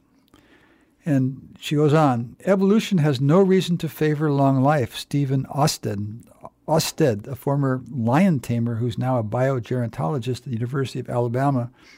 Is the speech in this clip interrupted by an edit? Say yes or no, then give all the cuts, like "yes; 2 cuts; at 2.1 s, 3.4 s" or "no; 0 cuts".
no; 0 cuts